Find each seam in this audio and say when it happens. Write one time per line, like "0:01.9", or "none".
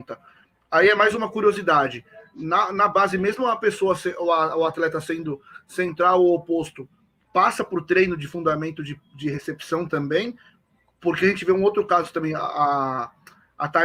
none